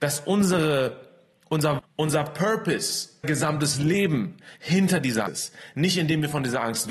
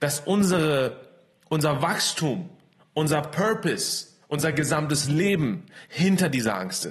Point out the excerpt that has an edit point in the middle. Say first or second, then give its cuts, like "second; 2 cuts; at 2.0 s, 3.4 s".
first; 3 cuts; at 1.8 s, 3.2 s, 5.3 s